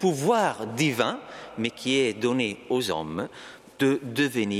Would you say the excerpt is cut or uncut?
uncut